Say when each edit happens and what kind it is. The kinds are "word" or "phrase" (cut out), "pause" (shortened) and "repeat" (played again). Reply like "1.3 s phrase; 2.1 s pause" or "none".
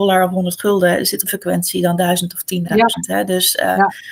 1.3 s phrase; 2.6 s word

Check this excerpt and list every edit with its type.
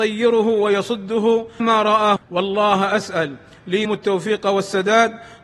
1.6 s word; 2.2 s word; 3.8 s word

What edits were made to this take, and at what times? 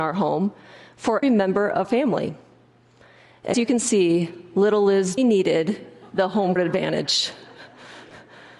1.2 s word; 1.8 s word; 3.5 s word; 5.2 s word; 6.6 s word

